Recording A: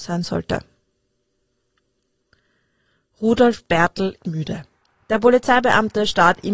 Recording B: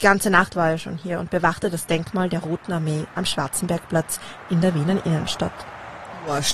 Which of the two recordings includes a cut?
A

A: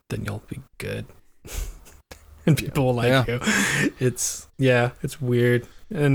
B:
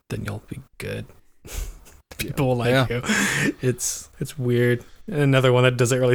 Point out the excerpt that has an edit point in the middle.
B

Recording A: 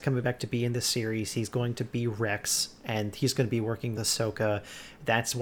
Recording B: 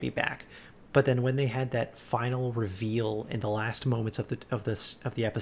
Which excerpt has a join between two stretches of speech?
A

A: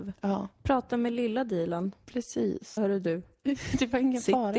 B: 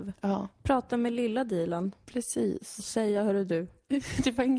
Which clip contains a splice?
A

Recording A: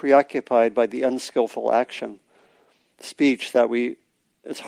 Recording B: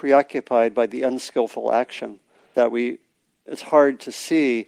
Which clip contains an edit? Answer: B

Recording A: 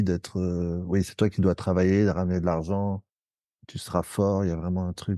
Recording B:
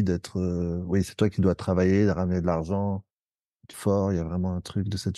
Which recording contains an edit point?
B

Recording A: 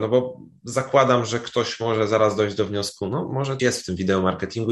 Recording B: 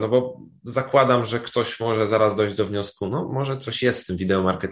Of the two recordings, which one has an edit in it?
A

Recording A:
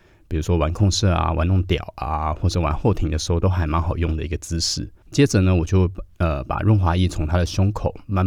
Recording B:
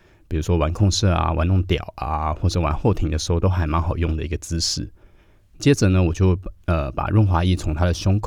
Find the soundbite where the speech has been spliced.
A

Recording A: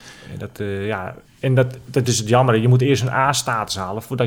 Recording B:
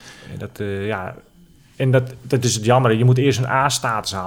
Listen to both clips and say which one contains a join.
A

